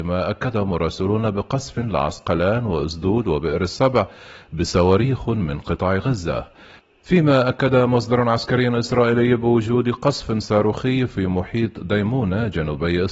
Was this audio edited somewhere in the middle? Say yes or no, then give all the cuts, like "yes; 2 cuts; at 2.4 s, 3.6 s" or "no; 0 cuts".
no; 0 cuts